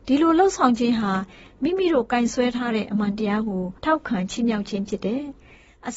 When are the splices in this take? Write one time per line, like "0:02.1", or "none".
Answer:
0:03.8